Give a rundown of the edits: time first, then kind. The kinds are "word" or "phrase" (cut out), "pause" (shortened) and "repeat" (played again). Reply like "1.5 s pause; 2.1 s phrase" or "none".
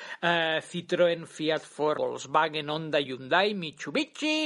1.9 s word